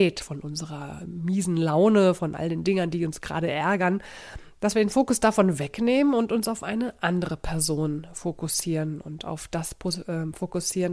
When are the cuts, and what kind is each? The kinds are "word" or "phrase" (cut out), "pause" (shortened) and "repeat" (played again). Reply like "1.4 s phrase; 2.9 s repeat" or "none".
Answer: none